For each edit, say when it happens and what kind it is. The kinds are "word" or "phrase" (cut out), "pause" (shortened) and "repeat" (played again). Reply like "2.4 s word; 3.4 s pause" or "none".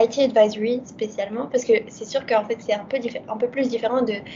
none